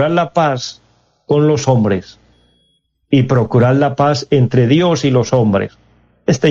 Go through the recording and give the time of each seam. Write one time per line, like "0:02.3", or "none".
none